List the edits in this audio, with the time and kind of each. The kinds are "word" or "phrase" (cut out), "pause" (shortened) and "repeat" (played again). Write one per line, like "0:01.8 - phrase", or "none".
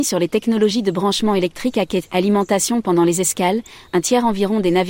none